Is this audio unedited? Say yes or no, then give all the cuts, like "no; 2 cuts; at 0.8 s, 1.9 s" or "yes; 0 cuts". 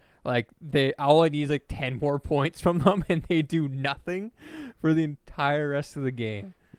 yes; 0 cuts